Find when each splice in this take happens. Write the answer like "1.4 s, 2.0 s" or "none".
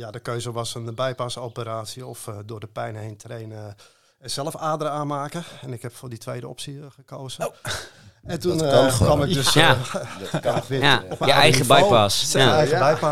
none